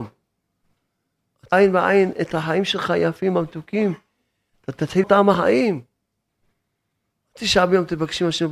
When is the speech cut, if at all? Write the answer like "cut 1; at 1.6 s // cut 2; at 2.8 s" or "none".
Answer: cut 1; at 1.5 s // cut 2; at 5.0 s